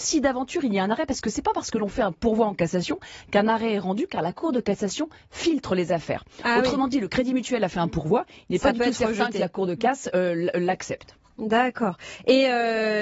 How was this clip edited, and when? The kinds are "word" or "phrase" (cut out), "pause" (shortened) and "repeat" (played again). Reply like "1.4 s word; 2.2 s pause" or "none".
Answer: none